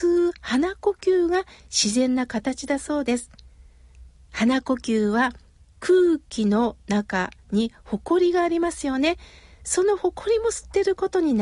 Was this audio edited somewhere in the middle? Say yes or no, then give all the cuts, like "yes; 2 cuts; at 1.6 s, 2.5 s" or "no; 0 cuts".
no; 0 cuts